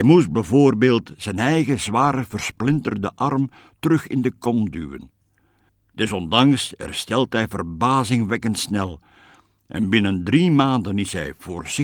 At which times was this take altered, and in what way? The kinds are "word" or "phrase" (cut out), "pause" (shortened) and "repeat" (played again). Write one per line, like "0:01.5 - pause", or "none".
none